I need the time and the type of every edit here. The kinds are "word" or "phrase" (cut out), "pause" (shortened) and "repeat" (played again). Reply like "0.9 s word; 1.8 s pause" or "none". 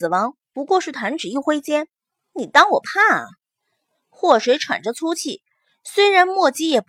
none